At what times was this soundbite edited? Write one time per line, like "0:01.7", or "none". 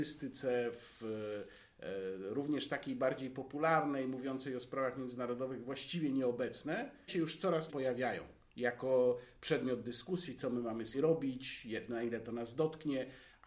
0:07.1
0:07.7
0:10.9